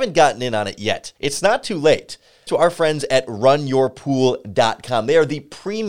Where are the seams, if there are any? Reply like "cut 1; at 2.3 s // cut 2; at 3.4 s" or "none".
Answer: cut 1; at 1.2 s // cut 2; at 2.5 s